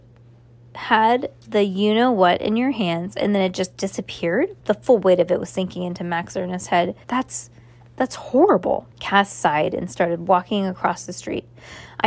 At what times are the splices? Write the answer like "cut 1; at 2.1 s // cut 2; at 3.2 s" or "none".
cut 1; at 4.6 s // cut 2; at 7.0 s // cut 3; at 8.9 s